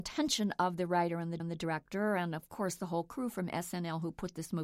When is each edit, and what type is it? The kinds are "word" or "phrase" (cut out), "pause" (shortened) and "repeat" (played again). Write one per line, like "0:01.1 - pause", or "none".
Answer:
0:01.4 - repeat